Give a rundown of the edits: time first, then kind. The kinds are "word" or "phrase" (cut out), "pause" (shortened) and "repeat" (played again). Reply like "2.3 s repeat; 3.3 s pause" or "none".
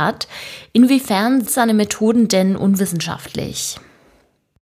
1.5 s word